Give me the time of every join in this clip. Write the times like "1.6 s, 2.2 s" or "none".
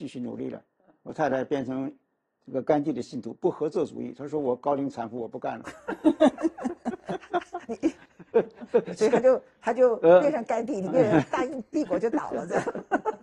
none